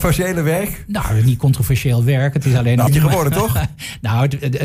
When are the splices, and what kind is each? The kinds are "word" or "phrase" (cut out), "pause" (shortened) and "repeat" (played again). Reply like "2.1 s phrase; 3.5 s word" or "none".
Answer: 2.9 s word